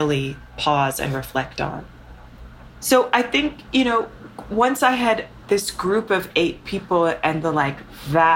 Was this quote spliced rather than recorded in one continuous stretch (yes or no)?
yes